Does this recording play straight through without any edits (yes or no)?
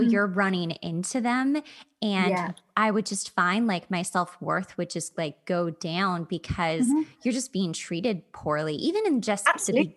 yes